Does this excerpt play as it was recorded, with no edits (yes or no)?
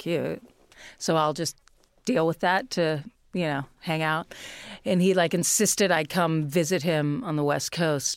yes